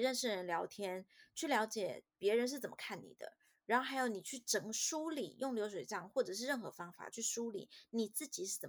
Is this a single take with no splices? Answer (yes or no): yes